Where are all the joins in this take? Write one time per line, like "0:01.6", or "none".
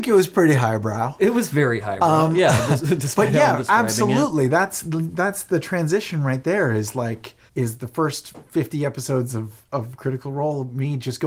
0:07.5